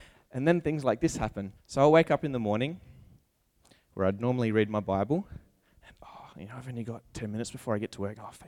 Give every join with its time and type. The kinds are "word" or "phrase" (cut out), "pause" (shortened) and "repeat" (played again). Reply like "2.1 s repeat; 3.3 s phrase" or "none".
1.6 s pause

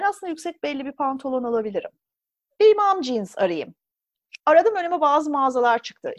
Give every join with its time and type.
2.2 s pause

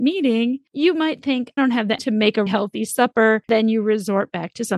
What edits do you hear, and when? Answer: 1.6 s word; 2.0 s word; 2.5 s word

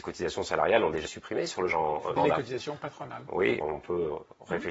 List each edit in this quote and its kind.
1.1 s word; 1.7 s word; 2.2 s word; 3.6 s word

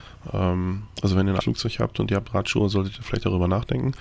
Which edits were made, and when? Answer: 1.4 s word

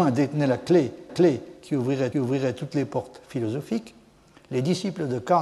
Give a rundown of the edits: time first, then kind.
1.1 s repeat; 2.1 s repeat

